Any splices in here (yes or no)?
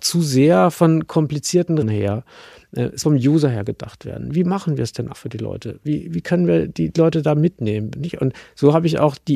yes